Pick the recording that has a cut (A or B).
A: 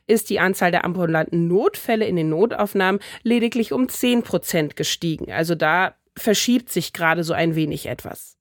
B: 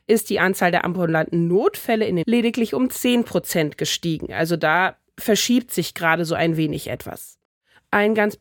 B